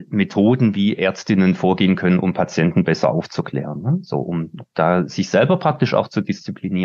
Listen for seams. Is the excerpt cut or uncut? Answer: uncut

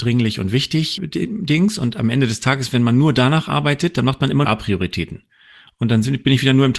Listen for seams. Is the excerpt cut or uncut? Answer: cut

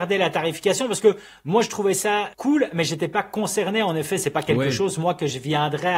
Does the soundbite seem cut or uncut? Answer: cut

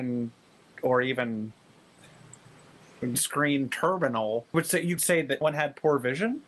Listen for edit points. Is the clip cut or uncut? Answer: cut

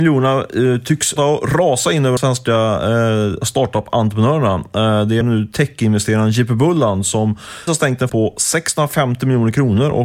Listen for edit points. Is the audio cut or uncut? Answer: cut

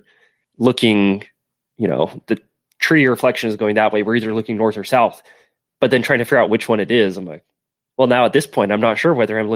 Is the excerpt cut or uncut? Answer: uncut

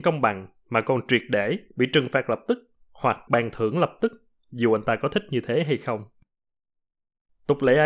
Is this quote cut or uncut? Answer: cut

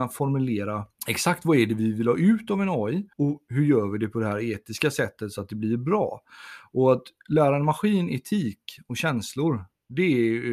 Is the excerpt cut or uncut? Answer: cut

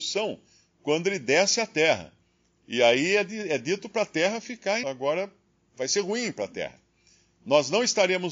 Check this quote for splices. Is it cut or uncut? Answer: cut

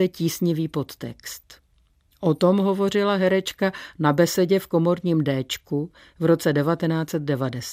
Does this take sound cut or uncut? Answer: uncut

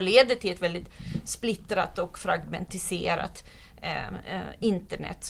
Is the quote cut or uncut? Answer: uncut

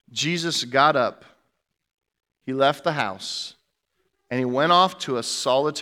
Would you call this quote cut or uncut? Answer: uncut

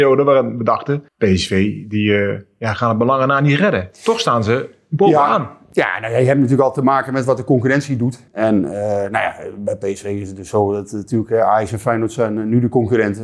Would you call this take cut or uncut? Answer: cut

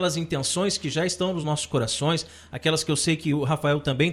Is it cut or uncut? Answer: uncut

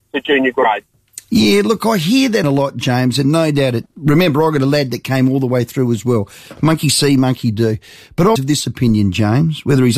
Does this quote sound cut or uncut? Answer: cut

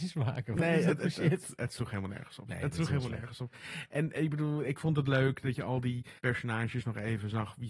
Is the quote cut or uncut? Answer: cut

